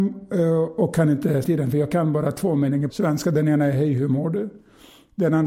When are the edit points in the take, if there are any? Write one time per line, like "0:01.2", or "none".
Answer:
0:01.4
0:02.9